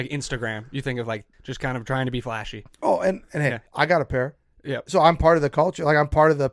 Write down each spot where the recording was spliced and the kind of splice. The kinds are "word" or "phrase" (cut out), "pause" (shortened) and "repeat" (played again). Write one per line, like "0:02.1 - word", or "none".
0:01.3 - pause
0:03.7 - pause